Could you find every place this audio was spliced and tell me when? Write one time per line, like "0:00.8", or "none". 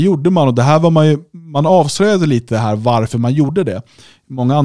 none